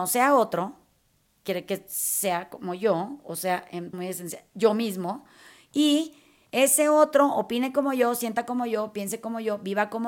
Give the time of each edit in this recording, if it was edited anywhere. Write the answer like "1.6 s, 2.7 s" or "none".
3.9 s